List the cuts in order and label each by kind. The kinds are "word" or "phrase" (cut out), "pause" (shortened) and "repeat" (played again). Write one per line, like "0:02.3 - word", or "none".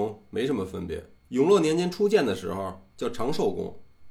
0:01.2 - pause